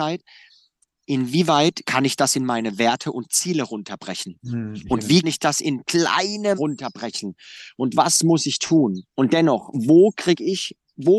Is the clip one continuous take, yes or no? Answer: no